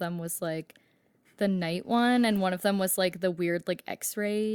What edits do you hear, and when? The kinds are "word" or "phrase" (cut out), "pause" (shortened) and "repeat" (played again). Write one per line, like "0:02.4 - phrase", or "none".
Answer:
none